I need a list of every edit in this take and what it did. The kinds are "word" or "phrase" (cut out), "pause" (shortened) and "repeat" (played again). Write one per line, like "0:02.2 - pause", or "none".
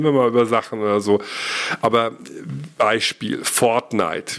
none

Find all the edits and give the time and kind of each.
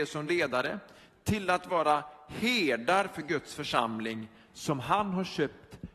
none

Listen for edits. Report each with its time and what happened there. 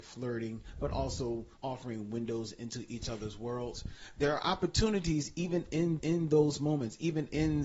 0:01.6 - pause
0:06.0 - repeat

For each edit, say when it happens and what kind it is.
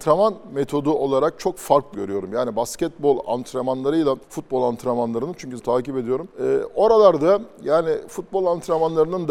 0:01.9 - word
0:04.2 - pause
0:05.6 - phrase
0:06.3 - pause

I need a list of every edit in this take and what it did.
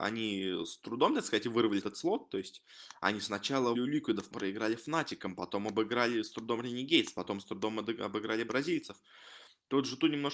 0:01.8 - word
0:03.7 - word
0:04.3 - word

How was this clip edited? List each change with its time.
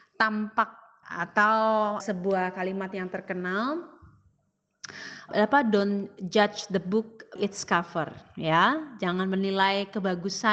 0:01.0 - word
0:02.0 - word
0:05.3 - word
0:07.4 - word

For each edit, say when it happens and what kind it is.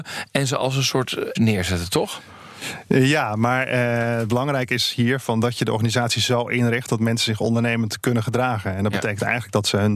0:01.4 - word

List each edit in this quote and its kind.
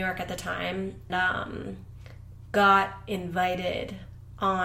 0:01.1 - word

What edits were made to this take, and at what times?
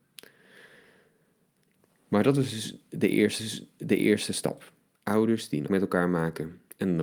0:03.4 - repeat
0:05.7 - word

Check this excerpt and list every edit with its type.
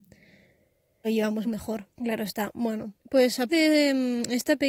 0:01.0 - word
0:01.4 - word
0:01.9 - pause
0:03.0 - pause
0:03.5 - word

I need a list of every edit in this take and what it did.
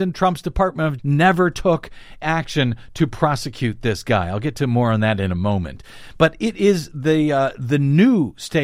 0:01.0 - word
0:02.2 - word

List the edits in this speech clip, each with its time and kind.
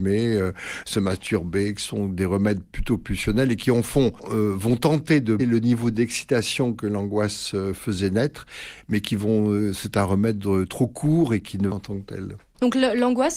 0:05.4 - word
0:11.7 - phrase

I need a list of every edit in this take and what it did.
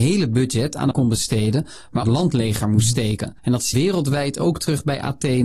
0:00.9 - word
0:02.0 - phrase
0:03.4 - pause
0:03.7 - word

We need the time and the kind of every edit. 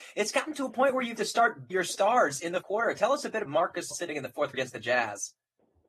0:01.2 - word
0:01.7 - word
0:02.6 - word
0:03.5 - word
0:03.9 - word
0:04.5 - word

